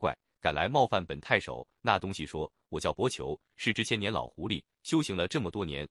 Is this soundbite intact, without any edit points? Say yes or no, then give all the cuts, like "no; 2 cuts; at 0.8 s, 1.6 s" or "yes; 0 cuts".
yes; 0 cuts